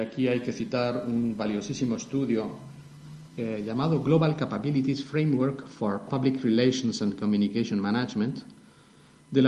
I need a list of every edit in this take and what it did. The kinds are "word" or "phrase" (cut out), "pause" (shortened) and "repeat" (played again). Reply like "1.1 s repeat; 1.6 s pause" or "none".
none